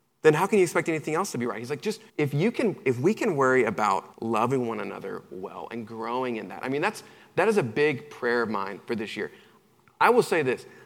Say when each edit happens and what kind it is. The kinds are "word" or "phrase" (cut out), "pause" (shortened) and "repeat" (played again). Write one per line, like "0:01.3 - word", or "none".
0:02.1 - pause
0:04.1 - pause